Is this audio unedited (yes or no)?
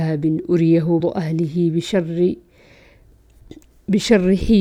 no